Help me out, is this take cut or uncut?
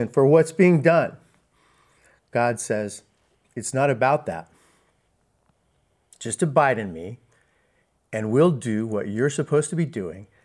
uncut